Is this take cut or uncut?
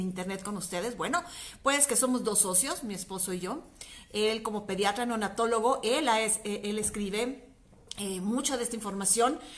uncut